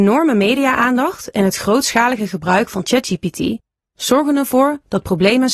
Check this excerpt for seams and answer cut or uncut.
uncut